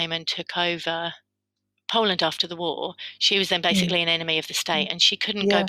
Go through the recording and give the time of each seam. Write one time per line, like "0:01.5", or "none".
none